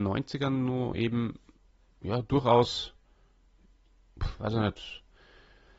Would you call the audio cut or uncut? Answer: uncut